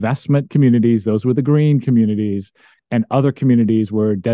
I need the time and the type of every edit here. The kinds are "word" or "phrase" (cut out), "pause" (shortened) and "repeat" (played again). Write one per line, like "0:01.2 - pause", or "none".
none